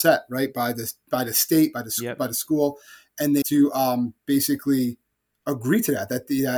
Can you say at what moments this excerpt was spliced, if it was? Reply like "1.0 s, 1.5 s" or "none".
3.4 s